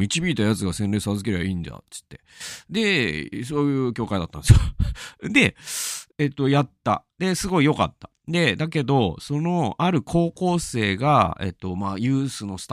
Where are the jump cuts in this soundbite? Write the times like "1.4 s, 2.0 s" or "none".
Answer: 6.1 s